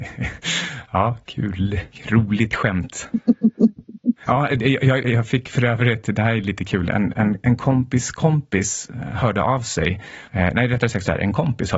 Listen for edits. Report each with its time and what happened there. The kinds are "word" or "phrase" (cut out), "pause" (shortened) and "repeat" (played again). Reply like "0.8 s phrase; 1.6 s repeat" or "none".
5.0 s word